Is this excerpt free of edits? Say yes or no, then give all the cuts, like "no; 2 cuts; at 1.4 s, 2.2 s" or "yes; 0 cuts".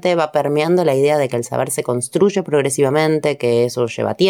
yes; 0 cuts